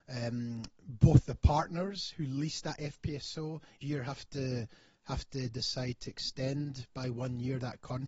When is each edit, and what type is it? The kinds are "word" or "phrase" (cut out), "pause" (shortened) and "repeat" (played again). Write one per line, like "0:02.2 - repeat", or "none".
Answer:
0:03.8 - word